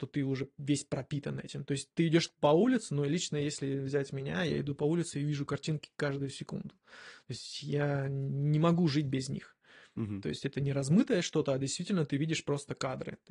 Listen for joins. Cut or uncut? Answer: uncut